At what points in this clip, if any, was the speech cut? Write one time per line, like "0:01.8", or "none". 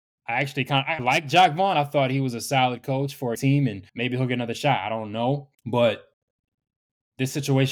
0:01.0
0:03.3
0:03.9
0:05.5